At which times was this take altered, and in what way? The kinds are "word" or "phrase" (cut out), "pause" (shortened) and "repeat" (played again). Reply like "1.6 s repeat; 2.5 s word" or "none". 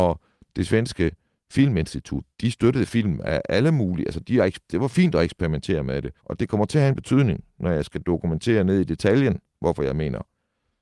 2.3 s pause; 4.2 s word; 4.6 s pause; 6.2 s pause